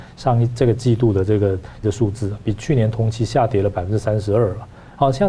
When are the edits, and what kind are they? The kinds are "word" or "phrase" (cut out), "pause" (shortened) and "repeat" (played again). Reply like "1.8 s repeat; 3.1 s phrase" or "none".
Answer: 1.8 s word